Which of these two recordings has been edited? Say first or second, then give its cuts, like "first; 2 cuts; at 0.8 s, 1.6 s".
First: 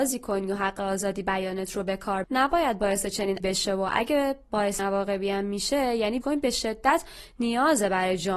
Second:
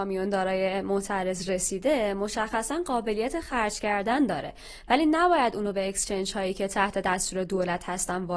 first; 4 cuts; at 2.2 s, 3.4 s, 4.8 s, 6.2 s